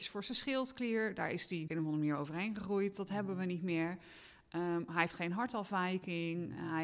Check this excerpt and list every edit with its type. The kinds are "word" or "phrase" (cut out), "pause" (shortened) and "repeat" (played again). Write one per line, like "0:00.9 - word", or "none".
0:01.7 - word